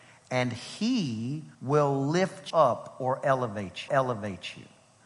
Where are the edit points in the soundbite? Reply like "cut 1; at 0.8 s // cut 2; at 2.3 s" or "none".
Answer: cut 1; at 1.5 s // cut 2; at 2.5 s // cut 3; at 3.9 s